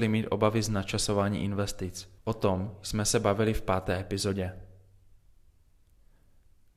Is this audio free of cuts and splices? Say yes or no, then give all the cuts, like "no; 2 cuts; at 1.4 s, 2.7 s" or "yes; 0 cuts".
no; 1 cut; at 2.2 s